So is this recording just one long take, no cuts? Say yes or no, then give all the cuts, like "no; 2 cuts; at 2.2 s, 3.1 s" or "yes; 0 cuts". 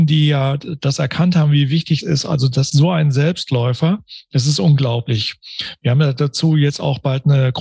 no; 2 cuts; at 2.0 s, 2.7 s